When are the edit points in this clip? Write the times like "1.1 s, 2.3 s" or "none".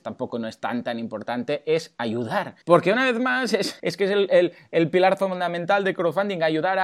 2.6 s, 3.8 s